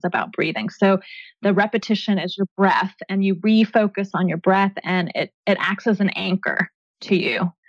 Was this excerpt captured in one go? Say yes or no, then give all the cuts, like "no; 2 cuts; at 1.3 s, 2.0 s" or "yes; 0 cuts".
no; 1 cut; at 4.1 s